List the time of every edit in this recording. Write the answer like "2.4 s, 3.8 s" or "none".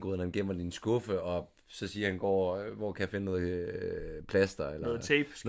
none